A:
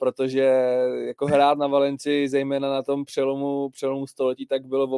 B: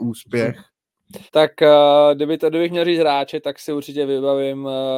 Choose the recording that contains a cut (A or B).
B